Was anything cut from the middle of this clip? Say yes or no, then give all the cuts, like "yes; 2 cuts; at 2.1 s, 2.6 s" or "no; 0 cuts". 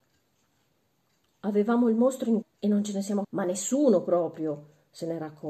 yes; 2 cuts; at 2.4 s, 3.2 s